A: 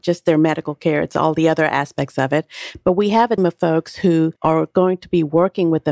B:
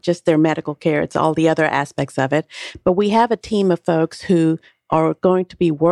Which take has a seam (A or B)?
A